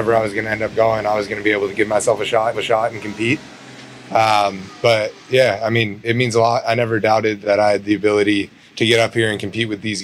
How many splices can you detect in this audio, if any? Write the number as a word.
four